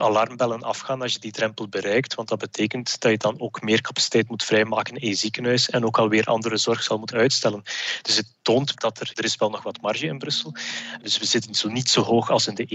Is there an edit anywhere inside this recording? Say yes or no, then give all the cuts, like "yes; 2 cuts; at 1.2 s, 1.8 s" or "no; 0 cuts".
yes; 3 cuts; at 7.1 s, 8.7 s, 9.1 s